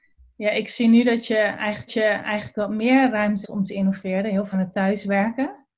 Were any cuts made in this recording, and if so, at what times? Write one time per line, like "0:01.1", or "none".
0:01.9
0:03.4
0:04.5